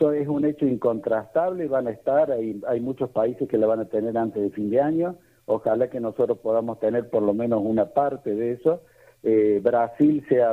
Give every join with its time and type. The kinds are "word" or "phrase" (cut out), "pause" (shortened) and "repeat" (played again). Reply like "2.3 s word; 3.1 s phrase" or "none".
none

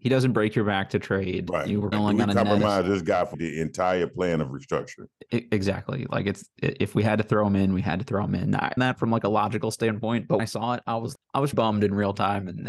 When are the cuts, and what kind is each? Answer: 1.9 s word; 3.3 s word; 8.8 s phrase; 10.4 s word; 11.1 s word; 11.5 s word

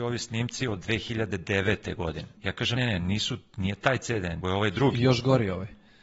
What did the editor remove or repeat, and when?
2.4 s pause; 2.8 s word; 4.4 s word

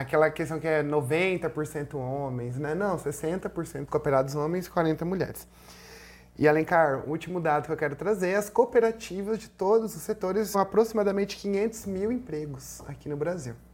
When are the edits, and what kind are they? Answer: 3.9 s phrase; 10.5 s word

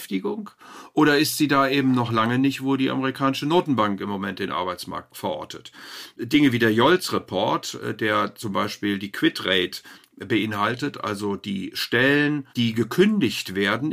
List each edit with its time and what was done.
12.5 s pause

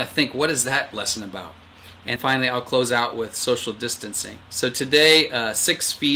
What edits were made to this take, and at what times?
2.2 s word; 4.4 s pause

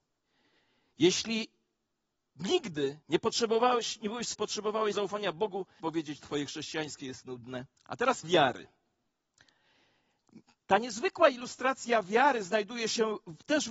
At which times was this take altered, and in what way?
3.0 s pause; 4.3 s phrase; 4.9 s word; 5.8 s phrase; 7.0 s word; 7.7 s pause; 8.2 s word

